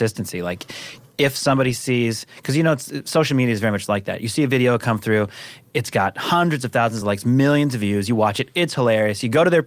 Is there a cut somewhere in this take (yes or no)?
no